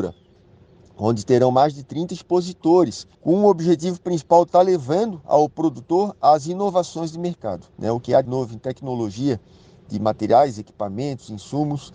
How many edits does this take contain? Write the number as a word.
three